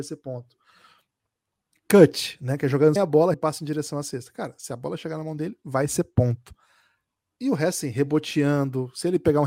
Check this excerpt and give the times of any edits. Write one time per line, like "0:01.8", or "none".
0:03.0
0:03.3